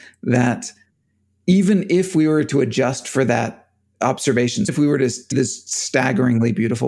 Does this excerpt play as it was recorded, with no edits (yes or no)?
no